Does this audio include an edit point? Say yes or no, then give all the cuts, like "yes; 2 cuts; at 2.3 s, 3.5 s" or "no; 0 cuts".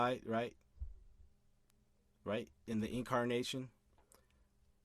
no; 0 cuts